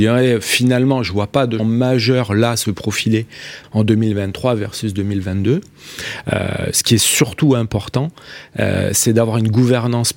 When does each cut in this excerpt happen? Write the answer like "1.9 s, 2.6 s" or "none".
1.6 s, 3.6 s